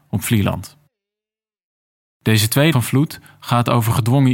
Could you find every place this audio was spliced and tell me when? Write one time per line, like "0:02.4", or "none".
0:02.7